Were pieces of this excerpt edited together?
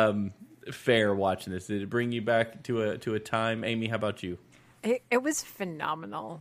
no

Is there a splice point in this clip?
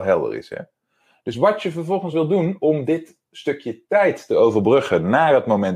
no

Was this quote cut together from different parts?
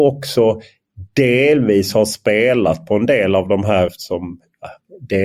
yes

